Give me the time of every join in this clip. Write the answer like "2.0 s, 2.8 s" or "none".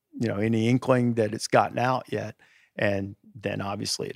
none